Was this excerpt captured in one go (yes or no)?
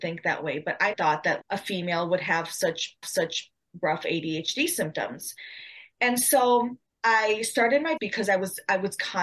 no